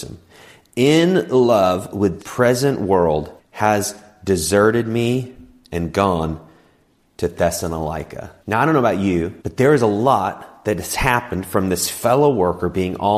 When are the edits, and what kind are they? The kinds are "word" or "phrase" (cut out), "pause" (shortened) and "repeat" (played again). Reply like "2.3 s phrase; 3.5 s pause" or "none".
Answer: 2.2 s word; 3.4 s pause; 8.4 s pause; 9.4 s pause